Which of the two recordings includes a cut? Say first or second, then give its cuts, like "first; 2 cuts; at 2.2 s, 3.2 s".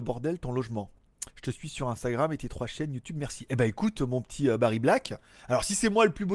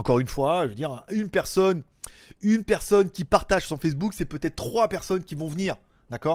first; 1 cut; at 1.3 s